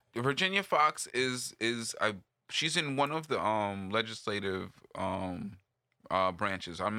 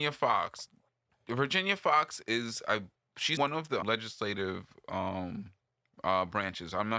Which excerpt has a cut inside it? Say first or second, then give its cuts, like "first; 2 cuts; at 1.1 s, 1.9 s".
second; 3 cuts; at 2.2 s, 3.4 s, 3.8 s